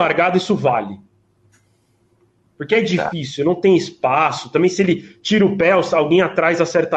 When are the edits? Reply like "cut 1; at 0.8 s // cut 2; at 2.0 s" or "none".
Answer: none